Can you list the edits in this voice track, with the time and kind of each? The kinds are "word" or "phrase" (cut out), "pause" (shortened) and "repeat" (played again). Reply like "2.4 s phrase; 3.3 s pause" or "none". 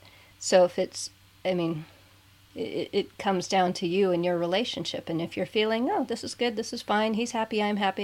none

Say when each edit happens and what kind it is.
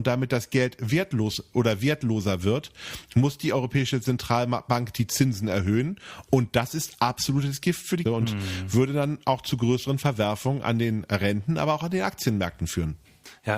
8.1 s word

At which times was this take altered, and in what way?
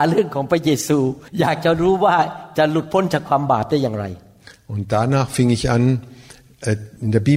1.3 s pause

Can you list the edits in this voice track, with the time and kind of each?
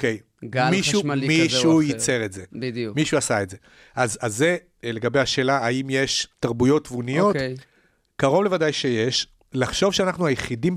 6.3 s pause

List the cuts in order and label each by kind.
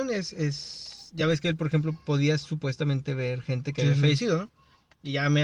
none

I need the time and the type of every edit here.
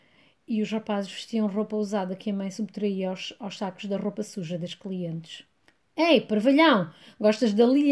5.6 s pause

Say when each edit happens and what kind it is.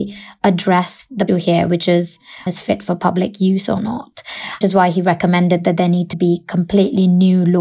1.3 s phrase; 2.5 s phrase; 4.6 s word; 6.1 s word

